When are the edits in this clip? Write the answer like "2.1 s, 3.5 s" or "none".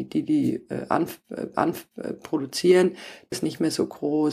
1.5 s, 3.3 s